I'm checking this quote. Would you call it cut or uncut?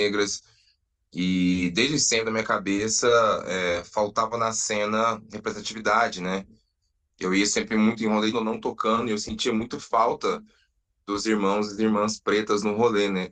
cut